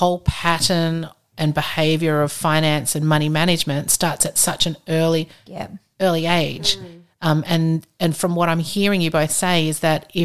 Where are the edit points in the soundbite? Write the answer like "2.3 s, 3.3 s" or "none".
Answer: none